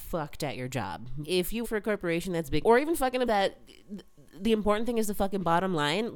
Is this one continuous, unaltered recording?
no; 4 cuts; at 1.2 s, 1.6 s, 2.6 s, 3.3 s

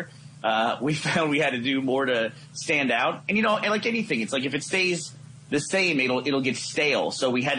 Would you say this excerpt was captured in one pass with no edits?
yes; 0 cuts

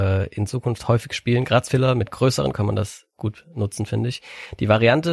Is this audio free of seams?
no; 2 cuts; at 1.7 s, 2.5 s

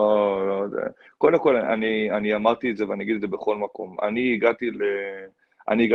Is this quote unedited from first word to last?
yes; 0 cuts

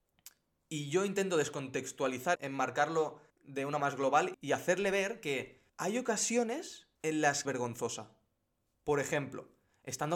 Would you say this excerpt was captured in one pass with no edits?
no; 7 cuts; at 2.3 s, 3.3 s, 3.8 s, 4.3 s, 5.7 s, 6.9 s, 7.4 s

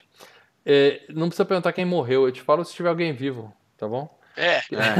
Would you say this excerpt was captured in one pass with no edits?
yes; 0 cuts

